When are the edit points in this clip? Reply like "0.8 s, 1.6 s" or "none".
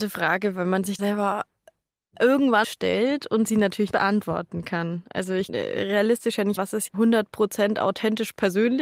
1.0 s, 2.6 s, 3.9 s, 5.5 s, 6.6 s, 6.9 s